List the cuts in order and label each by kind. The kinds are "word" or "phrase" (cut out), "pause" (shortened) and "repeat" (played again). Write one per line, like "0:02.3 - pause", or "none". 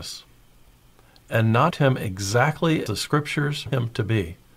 0:01.7 - word
0:02.9 - word
0:03.7 - word